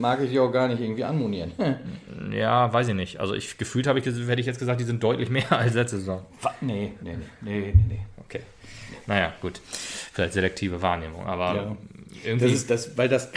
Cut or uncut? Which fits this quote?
uncut